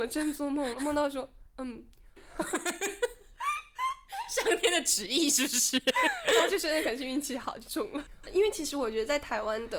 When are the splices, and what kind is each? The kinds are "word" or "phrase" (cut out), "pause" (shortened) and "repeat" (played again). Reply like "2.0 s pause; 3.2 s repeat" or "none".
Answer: 2.2 s phrase